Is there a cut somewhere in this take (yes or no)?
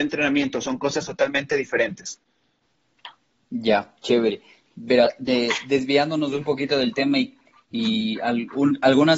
no